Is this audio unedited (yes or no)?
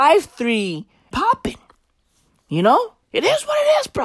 no